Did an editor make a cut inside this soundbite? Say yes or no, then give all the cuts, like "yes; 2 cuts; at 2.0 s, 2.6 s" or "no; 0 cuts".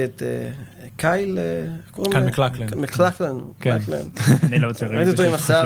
no; 0 cuts